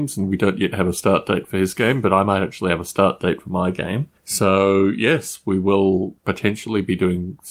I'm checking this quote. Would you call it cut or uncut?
cut